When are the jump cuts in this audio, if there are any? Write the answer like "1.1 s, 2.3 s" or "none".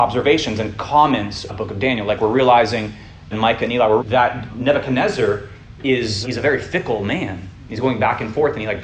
1.5 s, 3.3 s, 4.0 s, 4.5 s, 6.2 s